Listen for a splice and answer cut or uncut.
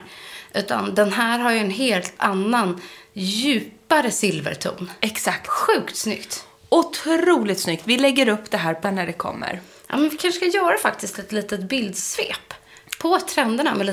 cut